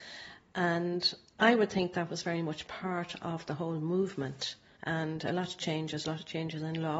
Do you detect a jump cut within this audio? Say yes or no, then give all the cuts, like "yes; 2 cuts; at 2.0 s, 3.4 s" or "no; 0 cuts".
no; 0 cuts